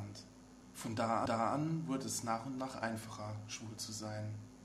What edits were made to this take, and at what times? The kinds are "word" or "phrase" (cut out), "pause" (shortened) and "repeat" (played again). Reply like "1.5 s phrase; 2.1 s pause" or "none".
1.3 s repeat

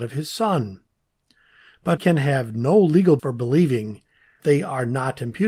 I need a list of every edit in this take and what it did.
2.0 s word; 3.2 s word; 4.4 s word

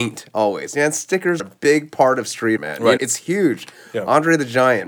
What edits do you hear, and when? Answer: 1.4 s word; 2.6 s word; 3.0 s word

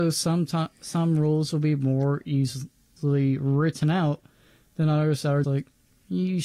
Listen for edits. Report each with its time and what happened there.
5.4 s word

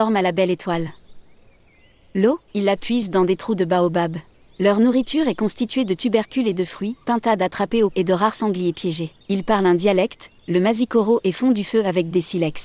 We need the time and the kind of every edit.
2.5 s pause; 4.3 s pause; 7.0 s word; 7.9 s word; 9.2 s pause

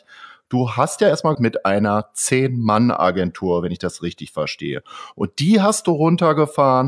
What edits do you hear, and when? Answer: 1.3 s word

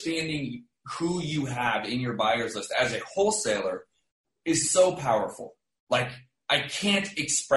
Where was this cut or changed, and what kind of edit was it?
none

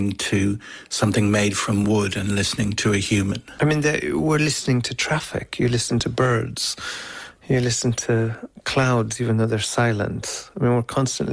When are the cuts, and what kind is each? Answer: none

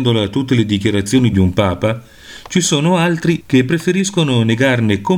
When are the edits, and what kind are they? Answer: 1.3 s phrase; 3.4 s word

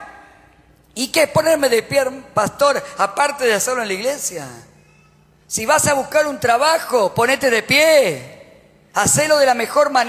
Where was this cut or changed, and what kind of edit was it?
none

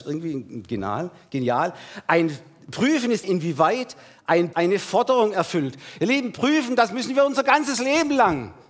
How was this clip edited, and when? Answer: 3.2 s phrase; 4.5 s word

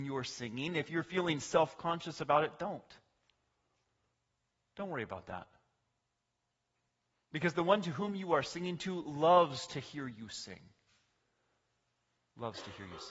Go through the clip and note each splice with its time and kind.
none

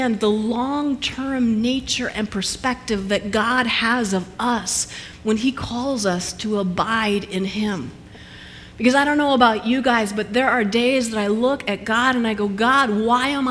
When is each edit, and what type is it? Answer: none

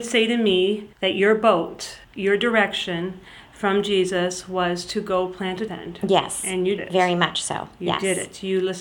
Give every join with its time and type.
0.9 s pause; 2.0 s pause; 5.7 s phrase; 6.8 s word

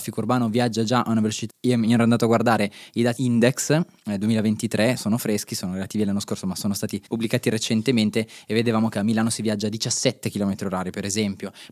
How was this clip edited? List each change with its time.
1.5 s word; 3.2 s phrase; 5.0 s word; 7.1 s pause

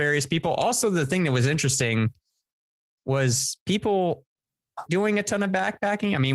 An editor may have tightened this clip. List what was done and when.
4.9 s word

